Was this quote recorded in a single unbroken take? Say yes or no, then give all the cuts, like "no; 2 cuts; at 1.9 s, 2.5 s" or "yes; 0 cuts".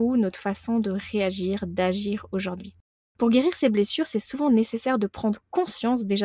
yes; 0 cuts